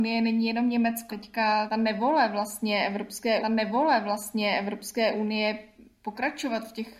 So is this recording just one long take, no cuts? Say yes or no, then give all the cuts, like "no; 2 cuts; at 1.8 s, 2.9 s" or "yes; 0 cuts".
no; 3 cuts; at 1.1 s, 1.7 s, 3.4 s